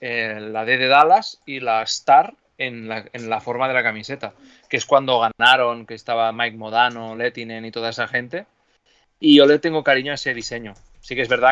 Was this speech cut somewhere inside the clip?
no; 0 cuts

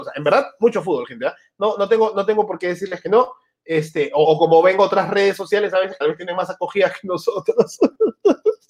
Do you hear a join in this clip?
yes; 2 cuts; at 4.2 s, 6.0 s

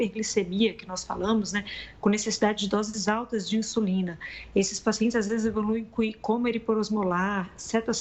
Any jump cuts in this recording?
no; 0 cuts

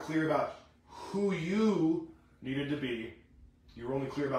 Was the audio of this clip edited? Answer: no; 0 cuts

